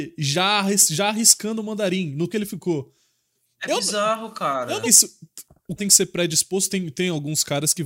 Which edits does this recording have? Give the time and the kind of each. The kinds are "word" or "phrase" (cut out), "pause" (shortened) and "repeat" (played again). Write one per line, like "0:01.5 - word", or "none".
0:02.3 - word
0:04.8 - word
0:05.8 - word

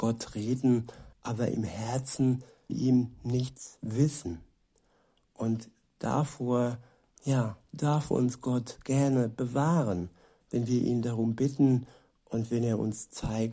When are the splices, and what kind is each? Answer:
0:01.1 - pause
0:02.7 - word

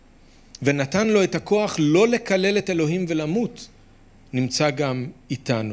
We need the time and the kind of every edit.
none

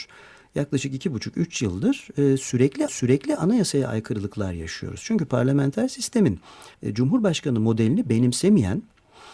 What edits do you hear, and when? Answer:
0:02.9 - repeat
0:06.7 - pause

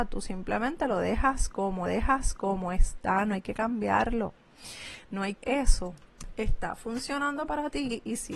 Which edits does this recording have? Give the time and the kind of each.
0:01.9 - repeat
0:05.4 - phrase

